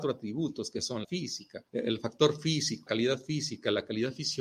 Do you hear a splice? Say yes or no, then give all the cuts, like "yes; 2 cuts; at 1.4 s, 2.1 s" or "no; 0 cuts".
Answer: yes; 3 cuts; at 1.0 s, 1.7 s, 2.9 s